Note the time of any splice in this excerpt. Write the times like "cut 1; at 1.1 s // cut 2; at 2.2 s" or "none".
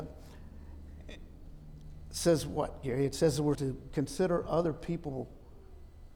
cut 1; at 3.5 s